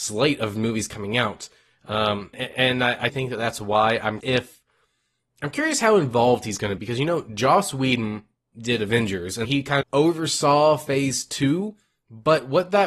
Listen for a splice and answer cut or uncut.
cut